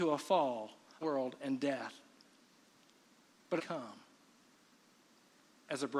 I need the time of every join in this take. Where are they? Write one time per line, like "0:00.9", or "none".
0:01.0
0:03.6